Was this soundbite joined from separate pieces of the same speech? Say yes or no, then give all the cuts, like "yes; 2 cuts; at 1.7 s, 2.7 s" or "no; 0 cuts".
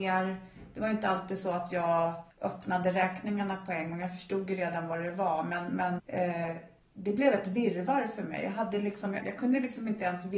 yes; 3 cuts; at 2.3 s, 6.0 s, 9.2 s